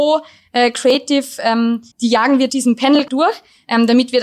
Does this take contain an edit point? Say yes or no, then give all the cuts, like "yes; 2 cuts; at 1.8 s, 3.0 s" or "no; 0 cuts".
yes; 3 cuts; at 1.9 s, 2.5 s, 3.1 s